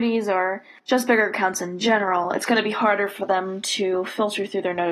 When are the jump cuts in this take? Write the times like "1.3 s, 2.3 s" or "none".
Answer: none